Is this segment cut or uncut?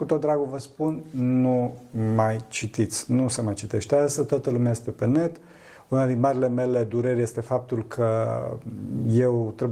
uncut